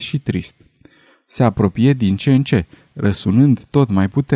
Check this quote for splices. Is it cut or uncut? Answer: uncut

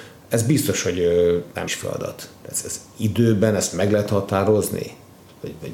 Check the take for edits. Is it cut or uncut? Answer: cut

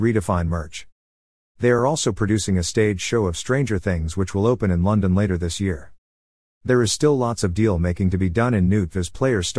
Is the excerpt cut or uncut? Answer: uncut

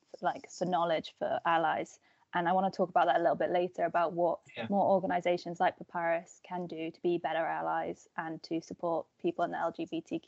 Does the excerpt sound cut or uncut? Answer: uncut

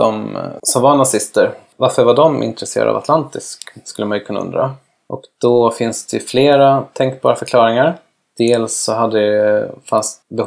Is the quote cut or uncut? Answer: uncut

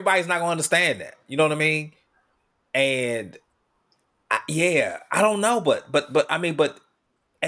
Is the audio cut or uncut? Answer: uncut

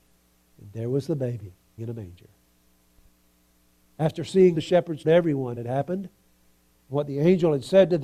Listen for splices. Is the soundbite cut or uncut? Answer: cut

